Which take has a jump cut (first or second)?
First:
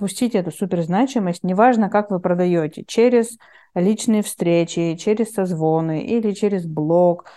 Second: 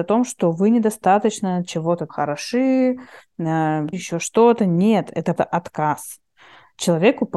second